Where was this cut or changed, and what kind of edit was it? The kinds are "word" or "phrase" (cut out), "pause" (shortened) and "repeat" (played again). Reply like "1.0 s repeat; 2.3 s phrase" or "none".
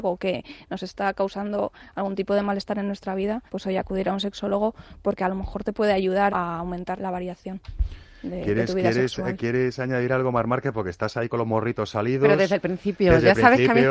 3.5 s pause; 6.3 s word; 7.0 s word